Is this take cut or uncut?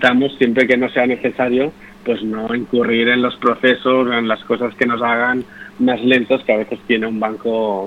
uncut